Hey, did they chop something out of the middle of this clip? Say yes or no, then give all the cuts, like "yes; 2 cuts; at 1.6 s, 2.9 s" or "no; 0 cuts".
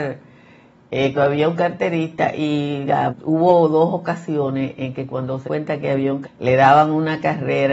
yes; 4 cuts; at 1.1 s, 3.1 s, 5.4 s, 6.2 s